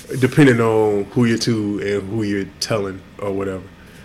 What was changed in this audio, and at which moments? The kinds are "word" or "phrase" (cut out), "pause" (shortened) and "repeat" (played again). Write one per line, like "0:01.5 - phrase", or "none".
0:01.4 - word